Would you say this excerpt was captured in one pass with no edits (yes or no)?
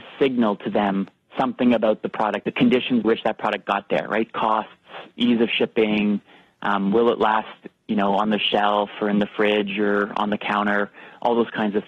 no